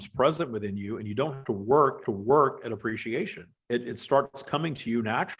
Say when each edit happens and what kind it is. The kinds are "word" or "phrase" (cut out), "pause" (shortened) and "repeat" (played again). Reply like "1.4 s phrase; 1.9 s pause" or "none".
1.4 s word; 2.0 s repeat; 3.6 s pause